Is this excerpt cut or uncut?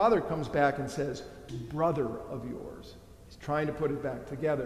cut